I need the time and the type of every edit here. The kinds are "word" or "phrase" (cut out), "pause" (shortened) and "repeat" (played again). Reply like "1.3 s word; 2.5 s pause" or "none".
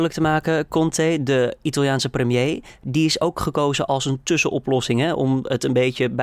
none